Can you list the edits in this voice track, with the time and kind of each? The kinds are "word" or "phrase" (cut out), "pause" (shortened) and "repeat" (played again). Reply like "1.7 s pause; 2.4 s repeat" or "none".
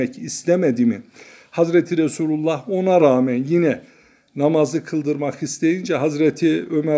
none